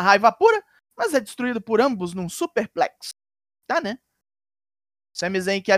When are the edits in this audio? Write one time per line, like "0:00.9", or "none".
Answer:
none